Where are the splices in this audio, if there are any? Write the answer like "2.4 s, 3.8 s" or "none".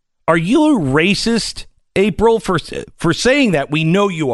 none